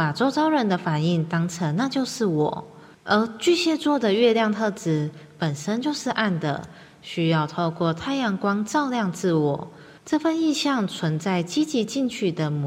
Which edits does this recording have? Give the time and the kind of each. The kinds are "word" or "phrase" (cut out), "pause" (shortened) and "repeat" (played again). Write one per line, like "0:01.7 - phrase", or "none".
0:02.9 - pause
0:10.0 - pause